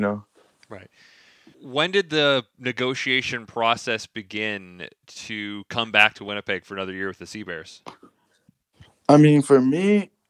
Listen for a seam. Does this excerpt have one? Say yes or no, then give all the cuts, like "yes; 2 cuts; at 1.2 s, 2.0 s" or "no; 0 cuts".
yes; 1 cut; at 1.5 s